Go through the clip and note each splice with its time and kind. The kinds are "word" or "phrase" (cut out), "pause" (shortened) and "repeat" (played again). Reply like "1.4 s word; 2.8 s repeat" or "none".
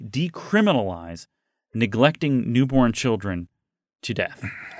none